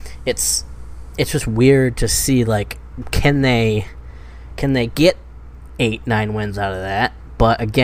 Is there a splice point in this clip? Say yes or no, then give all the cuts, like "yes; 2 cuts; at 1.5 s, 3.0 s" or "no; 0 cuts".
no; 0 cuts